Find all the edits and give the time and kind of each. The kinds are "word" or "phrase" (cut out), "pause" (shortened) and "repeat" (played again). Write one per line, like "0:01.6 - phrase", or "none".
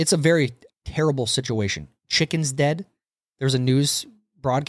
none